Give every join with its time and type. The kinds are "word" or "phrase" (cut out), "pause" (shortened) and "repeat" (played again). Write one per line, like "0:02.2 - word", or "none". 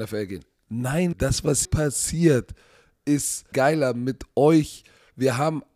0:01.1 - word
0:01.6 - word
0:03.5 - word